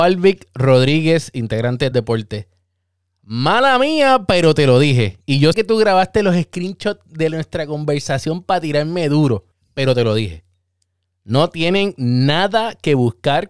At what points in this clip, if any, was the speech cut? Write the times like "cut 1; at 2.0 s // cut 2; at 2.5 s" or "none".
cut 1; at 1.9 s // cut 2; at 5.5 s // cut 3; at 9.5 s